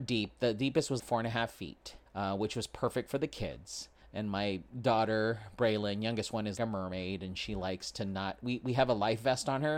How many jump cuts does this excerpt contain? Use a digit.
4